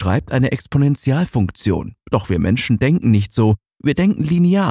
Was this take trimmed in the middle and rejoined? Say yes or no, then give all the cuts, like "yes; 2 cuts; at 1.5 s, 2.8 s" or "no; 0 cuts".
yes; 1 cut; at 2.0 s